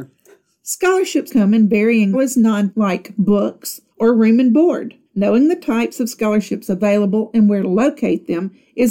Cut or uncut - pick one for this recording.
cut